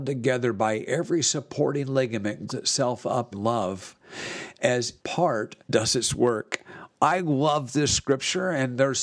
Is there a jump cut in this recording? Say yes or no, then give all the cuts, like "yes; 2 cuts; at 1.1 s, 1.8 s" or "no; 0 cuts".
yes; 4 cuts; at 2.5 s, 3.3 s, 5.0 s, 5.6 s